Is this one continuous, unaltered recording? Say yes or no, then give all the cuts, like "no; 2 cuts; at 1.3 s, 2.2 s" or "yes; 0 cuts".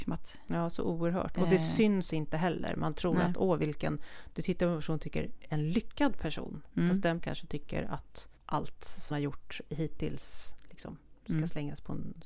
no; 4 cuts; at 2.1 s, 7.2 s, 8.4 s, 9.1 s